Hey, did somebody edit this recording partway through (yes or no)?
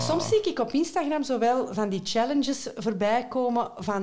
no